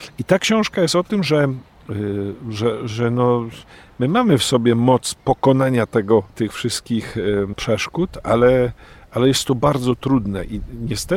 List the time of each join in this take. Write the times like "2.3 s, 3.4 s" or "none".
none